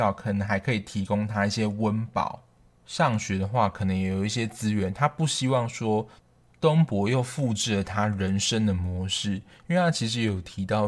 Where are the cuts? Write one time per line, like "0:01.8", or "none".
none